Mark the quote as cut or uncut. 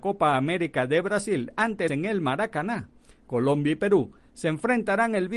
cut